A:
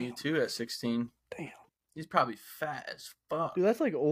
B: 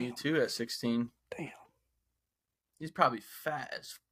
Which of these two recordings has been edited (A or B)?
A